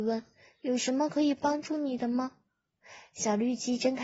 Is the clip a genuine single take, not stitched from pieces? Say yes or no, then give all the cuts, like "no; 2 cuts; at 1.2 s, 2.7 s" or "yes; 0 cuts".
yes; 0 cuts